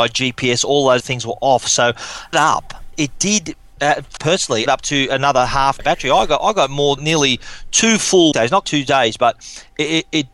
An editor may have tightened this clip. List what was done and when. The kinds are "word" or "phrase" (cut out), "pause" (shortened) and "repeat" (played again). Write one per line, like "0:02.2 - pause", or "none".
0:01.0 - word
0:02.3 - word
0:02.9 - word
0:04.2 - word
0:04.7 - word
0:05.8 - word
0:07.0 - word
0:08.3 - word
0:08.6 - word